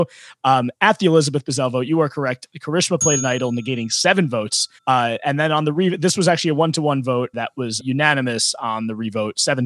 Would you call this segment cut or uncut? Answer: cut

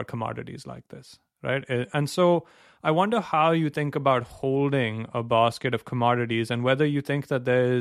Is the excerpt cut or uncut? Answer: uncut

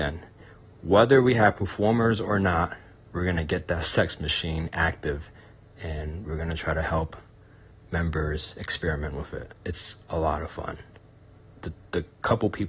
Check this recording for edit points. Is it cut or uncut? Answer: uncut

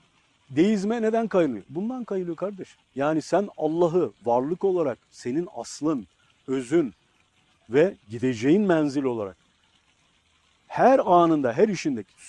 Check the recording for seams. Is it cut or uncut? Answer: uncut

